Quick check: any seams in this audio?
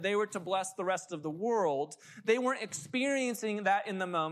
no; 0 cuts

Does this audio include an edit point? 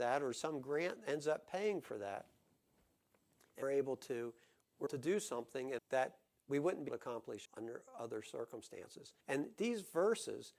yes; 6 cuts; at 3.6 s, 4.9 s, 5.8 s, 6.9 s, 7.5 s, 9.2 s

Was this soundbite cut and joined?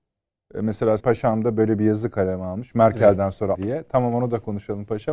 yes; 2 cuts; at 1.0 s, 3.5 s

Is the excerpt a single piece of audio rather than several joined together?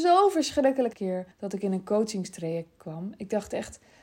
no; 2 cuts; at 0.9 s, 1.3 s

